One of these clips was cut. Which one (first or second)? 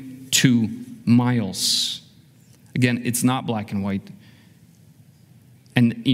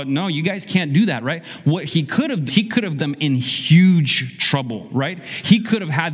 second